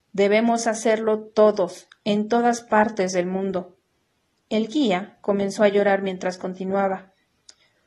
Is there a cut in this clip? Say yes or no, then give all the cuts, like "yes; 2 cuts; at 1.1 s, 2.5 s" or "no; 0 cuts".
no; 0 cuts